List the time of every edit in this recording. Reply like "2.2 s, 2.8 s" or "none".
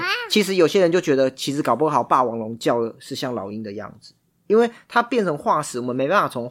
none